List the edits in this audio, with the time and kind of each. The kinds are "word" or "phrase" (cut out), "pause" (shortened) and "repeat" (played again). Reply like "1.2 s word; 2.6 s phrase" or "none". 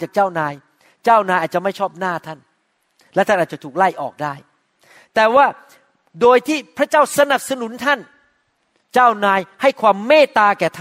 none